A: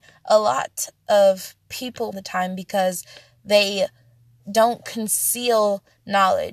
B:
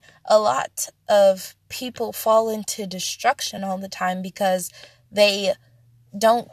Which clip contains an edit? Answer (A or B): A